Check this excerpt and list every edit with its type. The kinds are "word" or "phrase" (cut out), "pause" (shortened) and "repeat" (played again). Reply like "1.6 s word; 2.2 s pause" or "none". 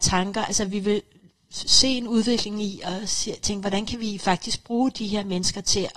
none